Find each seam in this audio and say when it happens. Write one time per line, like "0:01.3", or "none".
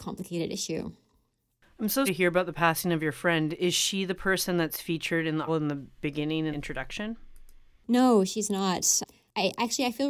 0:02.1
0:05.5
0:06.5